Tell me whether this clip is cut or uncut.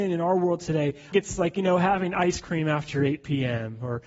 cut